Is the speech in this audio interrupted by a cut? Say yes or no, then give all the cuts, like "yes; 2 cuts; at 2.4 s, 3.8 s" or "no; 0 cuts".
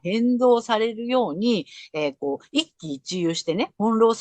no; 0 cuts